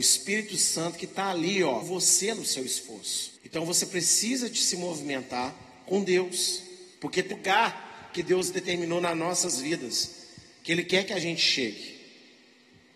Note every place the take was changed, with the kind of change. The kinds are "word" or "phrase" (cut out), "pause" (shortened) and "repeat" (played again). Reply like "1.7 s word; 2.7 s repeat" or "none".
1.8 s word; 3.4 s pause; 6.9 s pause; 7.3 s word